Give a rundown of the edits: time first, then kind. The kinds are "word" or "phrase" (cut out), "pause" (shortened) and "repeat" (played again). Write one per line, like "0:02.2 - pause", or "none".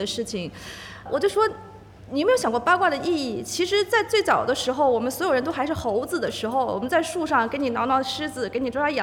0:01.1 - word